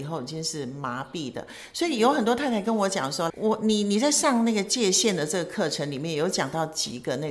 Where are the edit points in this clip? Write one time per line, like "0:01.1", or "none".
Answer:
0:03.3